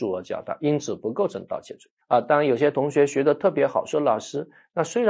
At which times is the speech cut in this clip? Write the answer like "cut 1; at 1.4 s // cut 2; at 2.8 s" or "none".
cut 1; at 2.0 s